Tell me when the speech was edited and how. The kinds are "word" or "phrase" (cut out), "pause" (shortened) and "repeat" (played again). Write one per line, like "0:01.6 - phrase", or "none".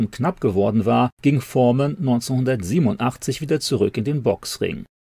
none